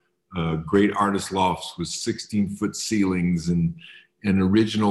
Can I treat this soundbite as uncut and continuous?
yes; 0 cuts

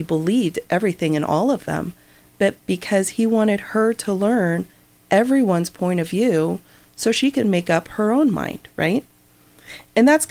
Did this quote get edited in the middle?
no; 0 cuts

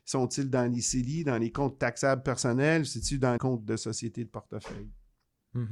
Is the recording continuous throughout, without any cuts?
no; 1 cut; at 3.4 s

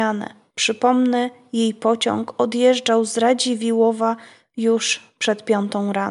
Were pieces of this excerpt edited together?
no; 0 cuts

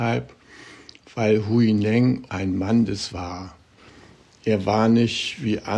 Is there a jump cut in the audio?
yes; 2 cuts; at 2.3 s, 3.1 s

